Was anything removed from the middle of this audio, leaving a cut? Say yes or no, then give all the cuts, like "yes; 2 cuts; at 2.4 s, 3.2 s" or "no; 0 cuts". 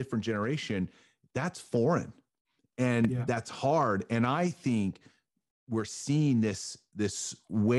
no; 0 cuts